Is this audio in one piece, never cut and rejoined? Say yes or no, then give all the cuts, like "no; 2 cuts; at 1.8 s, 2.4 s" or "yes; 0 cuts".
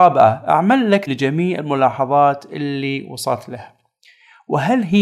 no; 1 cut; at 1.1 s